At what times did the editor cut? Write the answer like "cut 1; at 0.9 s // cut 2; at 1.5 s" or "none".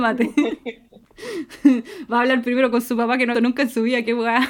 cut 1; at 3.3 s